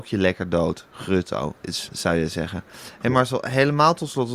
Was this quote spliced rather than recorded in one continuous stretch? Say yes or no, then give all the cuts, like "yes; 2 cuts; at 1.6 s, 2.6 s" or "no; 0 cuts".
yes; 1 cut; at 1.9 s